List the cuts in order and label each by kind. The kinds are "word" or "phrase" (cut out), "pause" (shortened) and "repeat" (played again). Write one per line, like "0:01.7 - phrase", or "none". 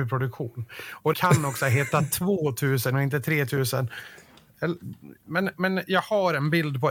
0:01.1 - word